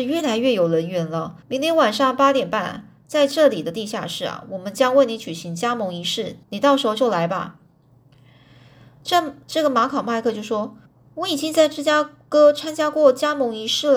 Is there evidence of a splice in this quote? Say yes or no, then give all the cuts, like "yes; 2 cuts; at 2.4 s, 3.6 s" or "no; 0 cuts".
yes; 3 cuts; at 1.4 s, 6.4 s, 10.9 s